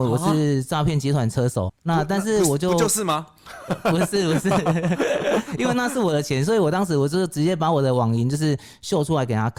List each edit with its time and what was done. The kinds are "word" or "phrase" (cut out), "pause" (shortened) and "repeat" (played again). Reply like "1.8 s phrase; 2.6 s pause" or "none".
1.7 s word